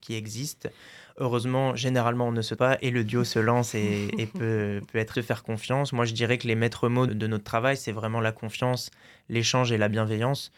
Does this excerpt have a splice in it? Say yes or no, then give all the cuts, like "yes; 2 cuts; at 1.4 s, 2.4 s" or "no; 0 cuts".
yes; 3 cuts; at 2.6 s, 5.1 s, 7.1 s